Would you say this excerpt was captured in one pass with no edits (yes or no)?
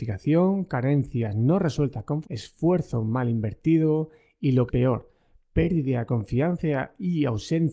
no